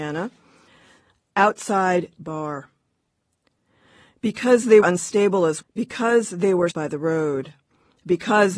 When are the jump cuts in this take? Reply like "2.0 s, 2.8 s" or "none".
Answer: 2.1 s, 4.8 s, 5.6 s, 6.7 s